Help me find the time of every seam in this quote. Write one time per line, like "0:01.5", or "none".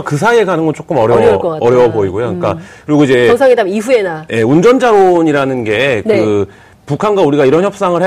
none